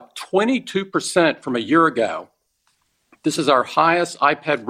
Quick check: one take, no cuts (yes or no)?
yes